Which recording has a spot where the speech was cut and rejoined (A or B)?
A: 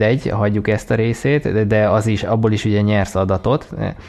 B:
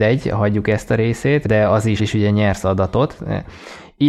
B